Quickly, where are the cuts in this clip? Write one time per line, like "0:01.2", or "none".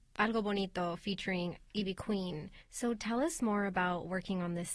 0:02.6